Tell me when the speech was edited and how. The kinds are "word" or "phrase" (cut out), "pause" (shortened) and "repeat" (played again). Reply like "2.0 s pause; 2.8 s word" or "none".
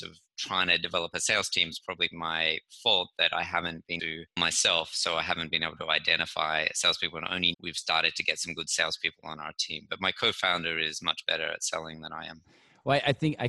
2.1 s word; 4.0 s word; 4.4 s word; 7.5 s word